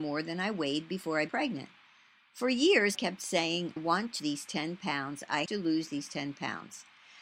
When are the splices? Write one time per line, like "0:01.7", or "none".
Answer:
0:01.3
0:02.9
0:03.8
0:04.2
0:05.5

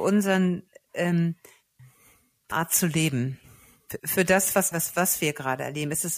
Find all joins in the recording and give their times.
0:02.5
0:04.0
0:04.7

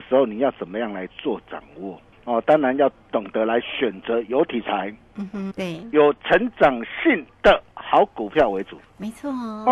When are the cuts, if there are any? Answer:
0:02.1
0:05.5

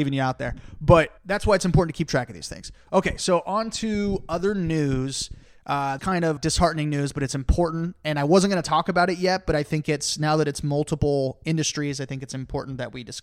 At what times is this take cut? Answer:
0:01.2
0:06.0
0:06.4

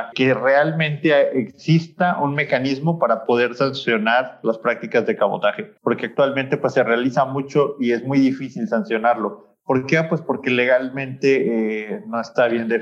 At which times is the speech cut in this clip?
0:05.8

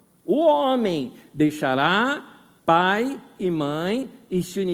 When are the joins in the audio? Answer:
0:02.6

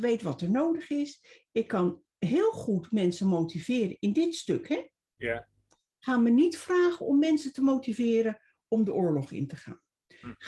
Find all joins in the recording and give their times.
none

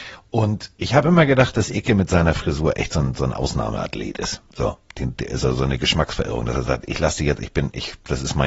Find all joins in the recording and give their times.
none

